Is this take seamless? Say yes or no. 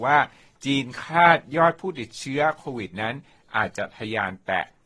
yes